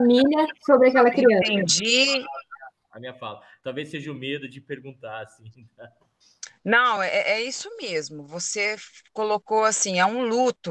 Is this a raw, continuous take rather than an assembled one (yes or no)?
yes